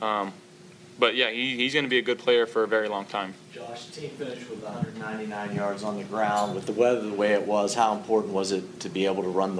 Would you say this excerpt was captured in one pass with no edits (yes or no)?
yes